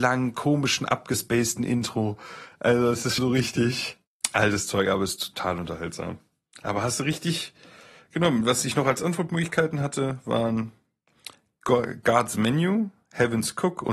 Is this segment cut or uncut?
cut